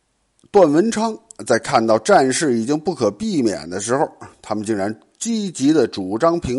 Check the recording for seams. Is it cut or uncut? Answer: uncut